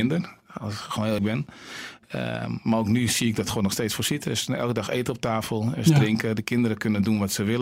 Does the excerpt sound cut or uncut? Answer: cut